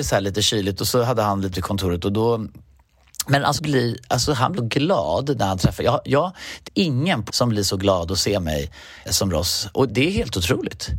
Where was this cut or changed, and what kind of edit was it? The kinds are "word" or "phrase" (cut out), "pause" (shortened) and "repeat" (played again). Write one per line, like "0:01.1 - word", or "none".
0:01.5 - word
0:03.6 - word
0:04.6 - word
0:06.7 - word
0:07.3 - word
0:09.1 - word
0:09.9 - word